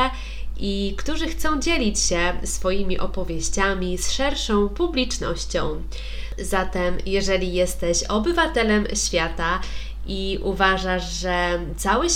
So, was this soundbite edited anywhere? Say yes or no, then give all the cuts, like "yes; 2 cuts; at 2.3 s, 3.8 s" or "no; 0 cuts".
no; 0 cuts